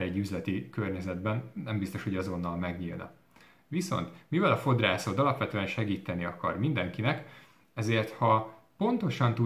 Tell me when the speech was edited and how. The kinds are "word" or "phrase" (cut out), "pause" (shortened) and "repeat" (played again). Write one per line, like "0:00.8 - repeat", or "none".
none